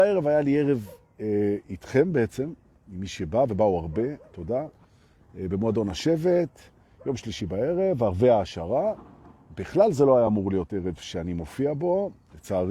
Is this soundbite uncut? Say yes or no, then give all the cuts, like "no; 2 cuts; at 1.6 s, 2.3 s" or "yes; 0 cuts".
yes; 0 cuts